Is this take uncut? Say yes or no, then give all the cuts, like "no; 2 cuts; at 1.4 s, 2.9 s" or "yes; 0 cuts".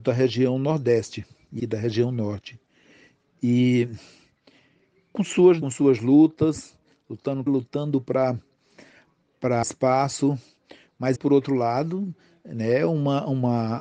no; 5 cuts; at 1.6 s, 5.6 s, 7.5 s, 9.6 s, 11.2 s